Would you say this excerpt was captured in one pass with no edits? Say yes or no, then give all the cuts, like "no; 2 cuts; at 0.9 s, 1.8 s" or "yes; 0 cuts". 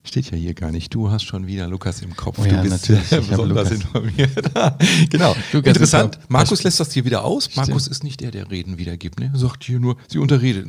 yes; 0 cuts